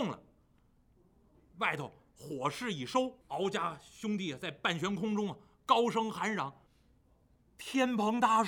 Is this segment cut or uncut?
cut